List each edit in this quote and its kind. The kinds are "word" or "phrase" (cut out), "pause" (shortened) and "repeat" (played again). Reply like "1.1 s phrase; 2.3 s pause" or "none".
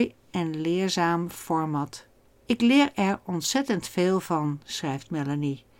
2.3 s pause